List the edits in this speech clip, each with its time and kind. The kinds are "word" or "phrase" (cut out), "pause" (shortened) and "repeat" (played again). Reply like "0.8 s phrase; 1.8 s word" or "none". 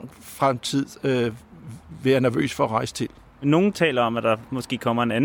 none